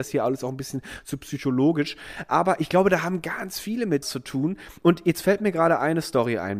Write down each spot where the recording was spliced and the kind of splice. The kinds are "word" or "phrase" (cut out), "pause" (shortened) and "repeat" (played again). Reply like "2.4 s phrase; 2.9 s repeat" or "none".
4.0 s word